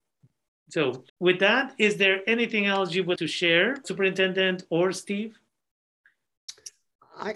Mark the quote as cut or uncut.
cut